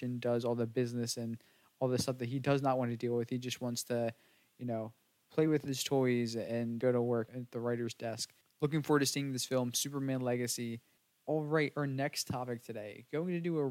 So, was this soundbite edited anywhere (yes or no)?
no